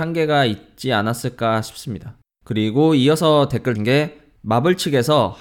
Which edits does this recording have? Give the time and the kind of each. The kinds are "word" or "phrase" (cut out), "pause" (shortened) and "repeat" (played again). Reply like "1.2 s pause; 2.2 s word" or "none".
2.3 s pause; 3.8 s word